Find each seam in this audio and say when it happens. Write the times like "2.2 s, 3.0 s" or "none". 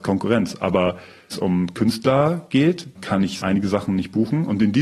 1.3 s, 3.0 s, 3.4 s